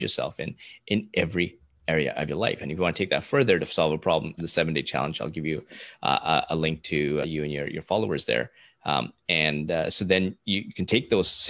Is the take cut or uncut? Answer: cut